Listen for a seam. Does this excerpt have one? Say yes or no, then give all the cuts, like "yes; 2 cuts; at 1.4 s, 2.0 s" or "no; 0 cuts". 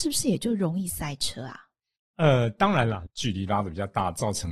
no; 0 cuts